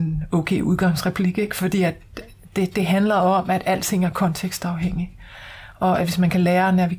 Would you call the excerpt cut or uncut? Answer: uncut